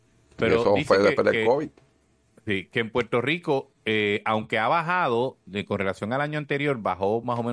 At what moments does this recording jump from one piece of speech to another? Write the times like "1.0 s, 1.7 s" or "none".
none